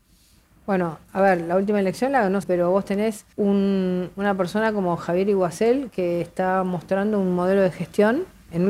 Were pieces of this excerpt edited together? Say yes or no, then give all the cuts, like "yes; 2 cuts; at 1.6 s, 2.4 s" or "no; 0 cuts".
yes; 2 cuts; at 2.4 s, 3.3 s